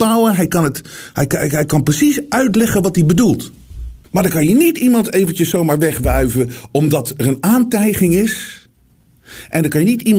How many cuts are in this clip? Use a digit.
1